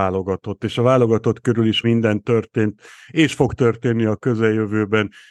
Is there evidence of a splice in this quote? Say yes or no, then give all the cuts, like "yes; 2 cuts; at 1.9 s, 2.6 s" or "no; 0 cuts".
yes; 1 cut; at 1.8 s